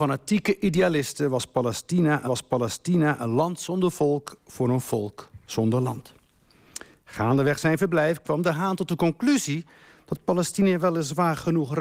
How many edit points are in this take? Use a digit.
1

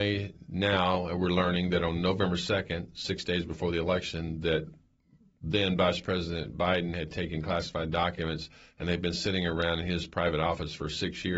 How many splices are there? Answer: 0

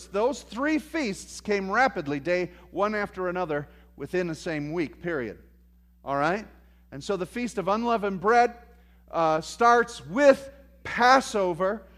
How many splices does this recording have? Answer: 0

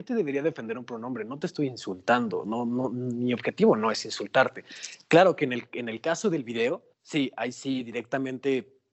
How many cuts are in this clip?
1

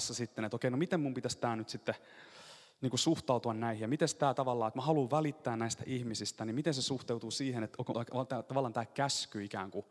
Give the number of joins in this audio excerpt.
1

